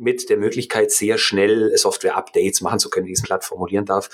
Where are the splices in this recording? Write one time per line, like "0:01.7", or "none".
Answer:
0:03.2